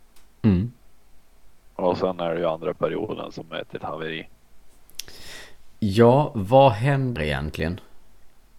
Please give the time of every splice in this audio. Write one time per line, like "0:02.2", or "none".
0:01.7
0:03.8
0:07.2